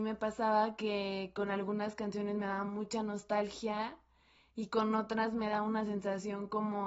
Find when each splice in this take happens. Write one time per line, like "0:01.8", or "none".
none